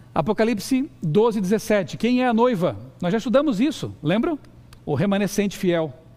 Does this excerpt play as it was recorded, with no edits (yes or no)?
no